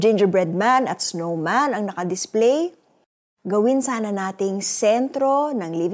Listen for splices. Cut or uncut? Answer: uncut